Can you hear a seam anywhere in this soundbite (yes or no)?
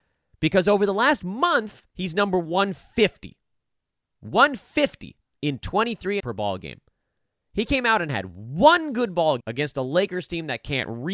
yes